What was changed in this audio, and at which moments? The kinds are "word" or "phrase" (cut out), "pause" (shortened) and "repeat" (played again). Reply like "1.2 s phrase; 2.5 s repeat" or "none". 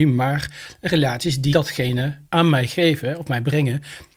1.5 s word; 2.2 s pause